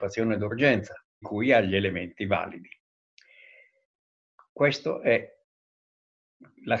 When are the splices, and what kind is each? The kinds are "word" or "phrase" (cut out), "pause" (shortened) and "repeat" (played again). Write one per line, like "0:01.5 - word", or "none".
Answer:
0:01.2 - word